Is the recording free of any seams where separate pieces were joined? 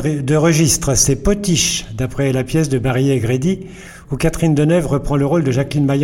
yes; 0 cuts

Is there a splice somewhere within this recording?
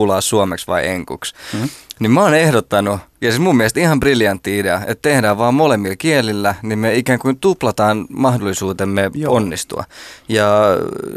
no; 0 cuts

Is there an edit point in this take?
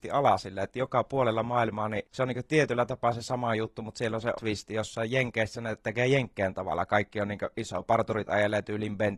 yes; 1 cut; at 4.3 s

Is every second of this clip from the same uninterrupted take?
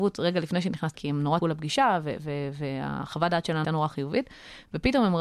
no; 3 cuts; at 0.9 s, 1.4 s, 3.6 s

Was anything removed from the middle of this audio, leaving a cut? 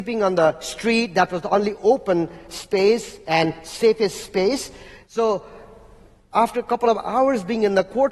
no; 0 cuts

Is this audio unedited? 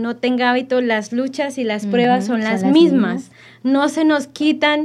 yes; 0 cuts

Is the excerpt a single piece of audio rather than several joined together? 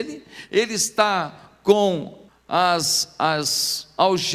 no; 1 cut; at 2.3 s

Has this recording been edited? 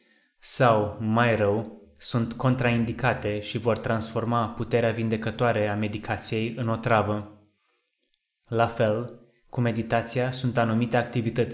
no; 0 cuts

